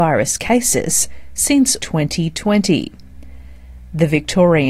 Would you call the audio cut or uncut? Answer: cut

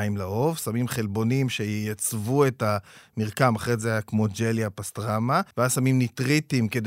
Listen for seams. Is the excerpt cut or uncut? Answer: cut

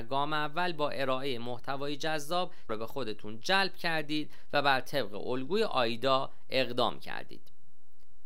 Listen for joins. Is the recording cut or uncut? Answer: cut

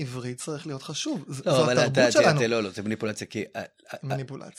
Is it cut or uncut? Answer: uncut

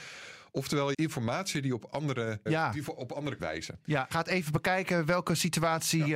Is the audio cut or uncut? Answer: cut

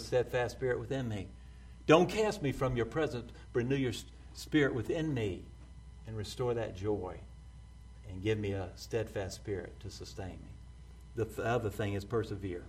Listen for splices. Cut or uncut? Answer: uncut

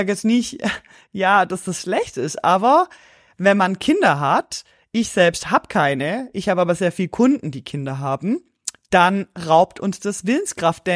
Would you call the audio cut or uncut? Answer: uncut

